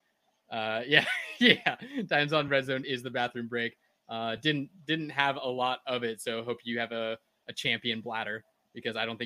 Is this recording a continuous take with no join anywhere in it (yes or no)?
yes